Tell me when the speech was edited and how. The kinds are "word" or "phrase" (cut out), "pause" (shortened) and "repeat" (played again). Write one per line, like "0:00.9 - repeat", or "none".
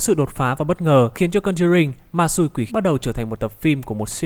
0:01.1 - word
0:02.7 - word